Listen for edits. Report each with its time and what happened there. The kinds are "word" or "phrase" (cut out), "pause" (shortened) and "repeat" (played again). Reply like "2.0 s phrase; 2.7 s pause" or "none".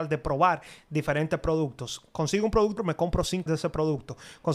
2.8 s word; 3.5 s word